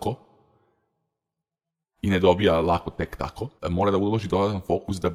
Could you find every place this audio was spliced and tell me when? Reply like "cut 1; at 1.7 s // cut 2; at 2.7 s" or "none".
cut 1; at 3.6 s